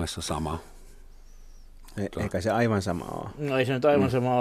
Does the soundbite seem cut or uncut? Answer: uncut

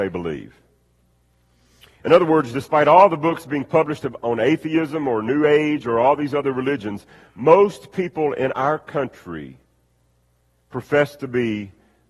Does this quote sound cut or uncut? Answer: uncut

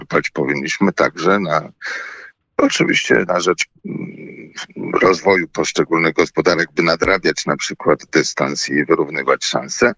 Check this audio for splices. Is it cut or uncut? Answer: uncut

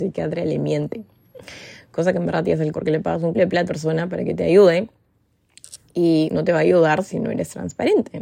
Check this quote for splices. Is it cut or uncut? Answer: cut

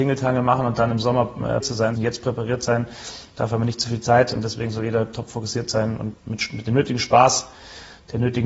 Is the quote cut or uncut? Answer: cut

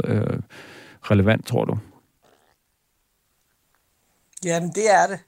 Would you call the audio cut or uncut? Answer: uncut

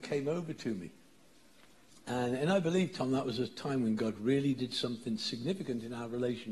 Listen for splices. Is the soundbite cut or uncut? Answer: uncut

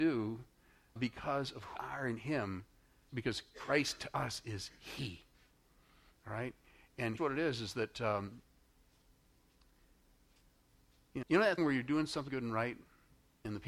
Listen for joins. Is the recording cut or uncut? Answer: cut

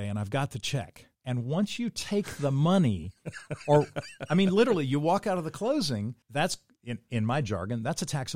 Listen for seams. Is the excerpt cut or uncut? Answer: cut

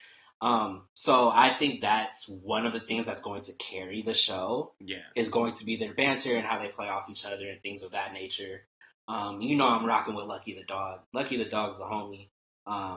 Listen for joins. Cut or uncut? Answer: uncut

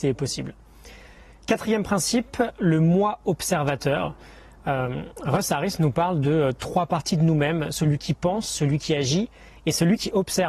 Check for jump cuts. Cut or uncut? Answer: uncut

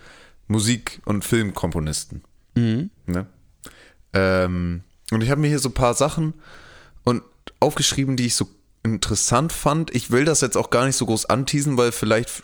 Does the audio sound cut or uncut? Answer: cut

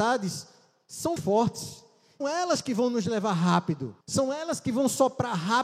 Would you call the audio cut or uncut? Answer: cut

